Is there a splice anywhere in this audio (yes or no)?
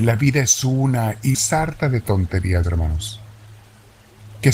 yes